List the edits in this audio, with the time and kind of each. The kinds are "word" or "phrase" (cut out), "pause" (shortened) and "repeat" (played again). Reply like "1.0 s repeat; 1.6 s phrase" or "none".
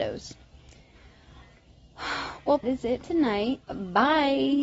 2.6 s phrase; 3.0 s word; 3.6 s pause